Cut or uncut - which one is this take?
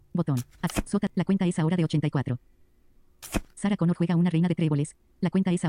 cut